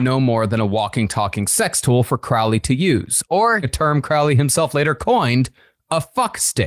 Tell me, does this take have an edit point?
yes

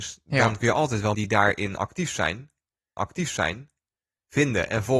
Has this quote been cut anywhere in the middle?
yes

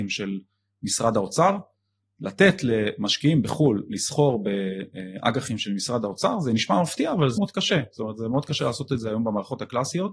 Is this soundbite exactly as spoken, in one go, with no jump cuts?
no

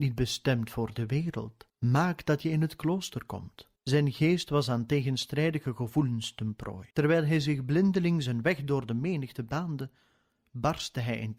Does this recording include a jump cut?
yes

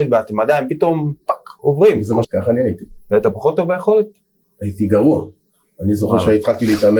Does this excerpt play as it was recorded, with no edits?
no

